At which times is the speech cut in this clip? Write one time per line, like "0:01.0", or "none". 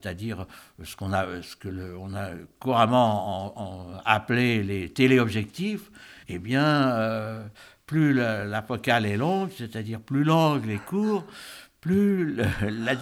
0:06.2